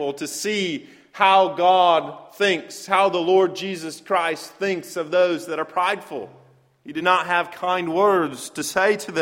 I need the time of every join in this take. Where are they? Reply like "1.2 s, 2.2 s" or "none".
none

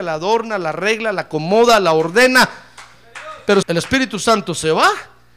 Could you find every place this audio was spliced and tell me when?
3.6 s

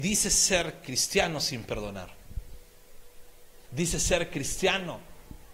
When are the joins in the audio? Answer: 3.6 s

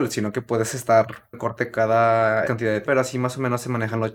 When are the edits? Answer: 1.3 s, 2.4 s, 2.8 s

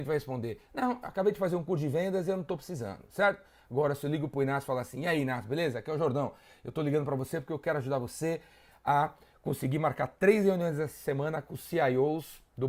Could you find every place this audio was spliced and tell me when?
none

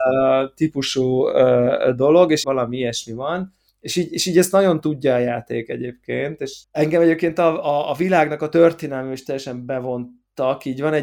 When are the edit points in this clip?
2.4 s, 3.7 s, 6.6 s, 7.6 s

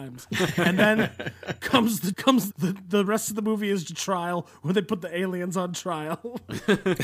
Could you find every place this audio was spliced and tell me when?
2.1 s, 2.5 s, 3.8 s

